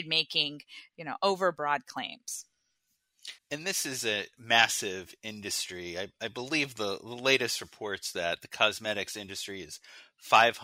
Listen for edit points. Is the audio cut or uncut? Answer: cut